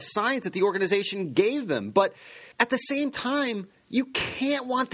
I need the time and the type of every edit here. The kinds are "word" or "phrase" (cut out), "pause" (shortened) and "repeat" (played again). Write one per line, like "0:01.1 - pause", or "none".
0:02.5 - pause